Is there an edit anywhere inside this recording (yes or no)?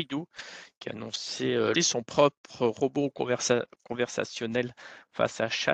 yes